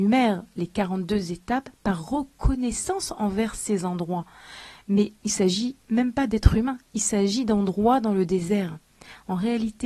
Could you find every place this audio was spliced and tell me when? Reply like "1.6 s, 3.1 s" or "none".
5.2 s